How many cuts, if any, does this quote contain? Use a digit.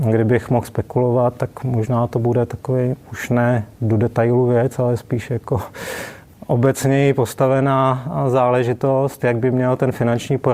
1